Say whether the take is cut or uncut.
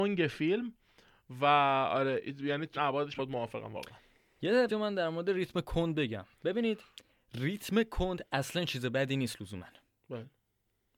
cut